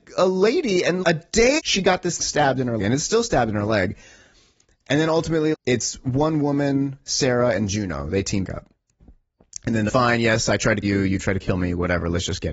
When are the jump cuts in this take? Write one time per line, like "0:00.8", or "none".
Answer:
0:01.0
0:01.6
0:02.2
0:02.8
0:05.5
0:08.4
0:09.9
0:10.8